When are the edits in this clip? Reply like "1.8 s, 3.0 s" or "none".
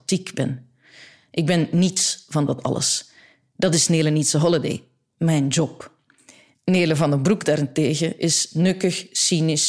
none